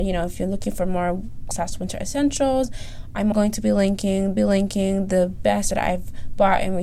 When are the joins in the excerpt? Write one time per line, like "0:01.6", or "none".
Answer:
0:01.5
0:03.3
0:04.4
0:05.7